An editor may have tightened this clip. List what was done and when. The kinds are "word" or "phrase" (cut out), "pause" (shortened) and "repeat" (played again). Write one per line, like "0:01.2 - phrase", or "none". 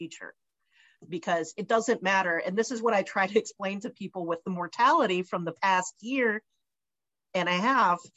none